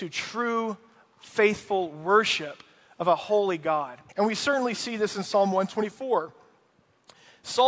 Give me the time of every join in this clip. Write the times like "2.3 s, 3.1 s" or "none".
4.1 s